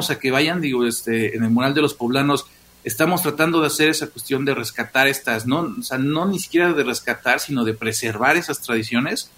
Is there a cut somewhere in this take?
no; 0 cuts

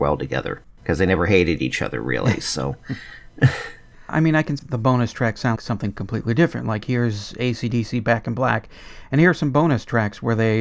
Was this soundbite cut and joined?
yes; 2 cuts; at 4.6 s, 5.6 s

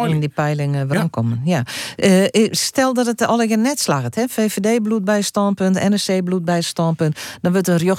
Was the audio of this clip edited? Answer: no; 0 cuts

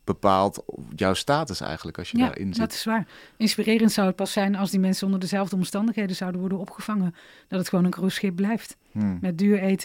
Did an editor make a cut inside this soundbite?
no; 0 cuts

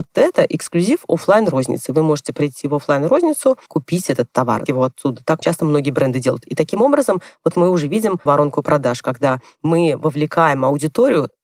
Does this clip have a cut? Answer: yes; 4 cuts; at 3.7 s, 4.7 s, 5.4 s, 8.3 s

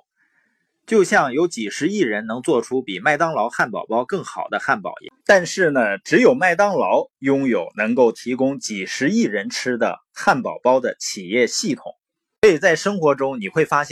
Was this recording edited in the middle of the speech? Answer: yes; 1 cut; at 5.2 s

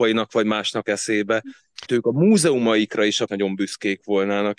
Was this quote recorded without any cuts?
no; 2 cuts; at 1.9 s, 3.3 s

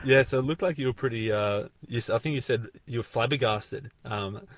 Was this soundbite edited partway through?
yes; 1 cut; at 1.8 s

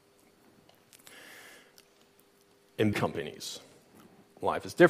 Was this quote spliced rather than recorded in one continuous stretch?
yes; 1 cut; at 2.9 s

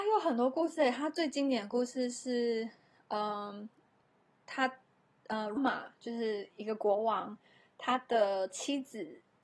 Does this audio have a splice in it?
yes; 1 cut; at 5.6 s

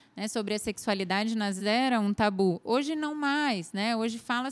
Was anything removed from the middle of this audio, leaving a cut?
yes; 1 cut; at 1.6 s

